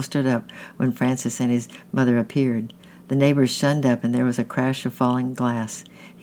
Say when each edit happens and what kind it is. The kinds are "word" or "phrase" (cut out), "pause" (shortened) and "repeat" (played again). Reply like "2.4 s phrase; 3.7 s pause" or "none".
none